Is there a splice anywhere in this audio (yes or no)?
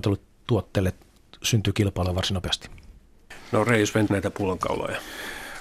yes